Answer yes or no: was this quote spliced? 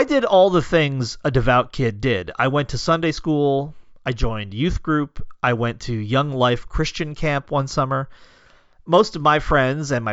no